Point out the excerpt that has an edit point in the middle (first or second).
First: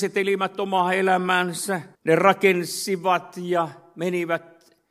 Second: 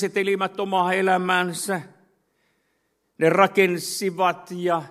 first